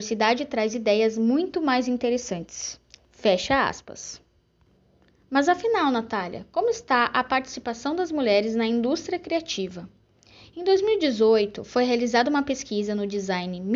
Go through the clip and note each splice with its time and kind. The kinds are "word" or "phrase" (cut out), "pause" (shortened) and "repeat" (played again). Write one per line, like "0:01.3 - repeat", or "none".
none